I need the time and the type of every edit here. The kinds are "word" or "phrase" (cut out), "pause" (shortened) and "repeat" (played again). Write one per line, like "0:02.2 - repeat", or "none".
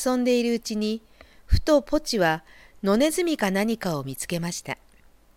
none